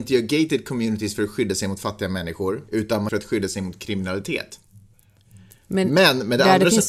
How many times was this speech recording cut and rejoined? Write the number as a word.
two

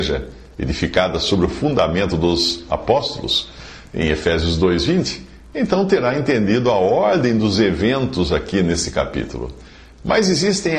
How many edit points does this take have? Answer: zero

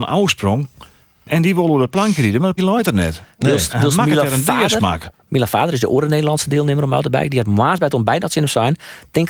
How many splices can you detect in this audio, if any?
one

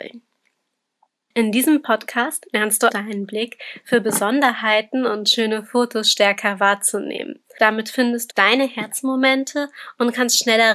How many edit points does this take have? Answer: two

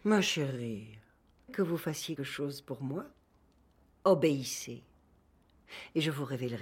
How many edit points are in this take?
two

